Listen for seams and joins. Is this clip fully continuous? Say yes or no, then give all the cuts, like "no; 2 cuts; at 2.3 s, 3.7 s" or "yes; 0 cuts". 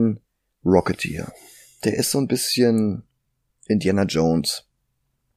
yes; 0 cuts